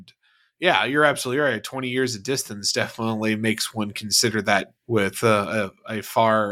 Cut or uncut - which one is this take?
cut